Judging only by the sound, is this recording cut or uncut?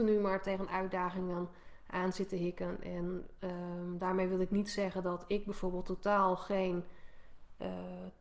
uncut